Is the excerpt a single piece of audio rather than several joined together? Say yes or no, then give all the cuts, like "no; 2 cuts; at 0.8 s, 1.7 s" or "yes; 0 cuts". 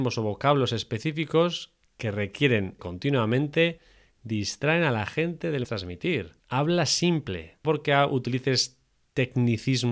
no; 5 cuts; at 1.9 s, 2.8 s, 5.6 s, 6.4 s, 7.6 s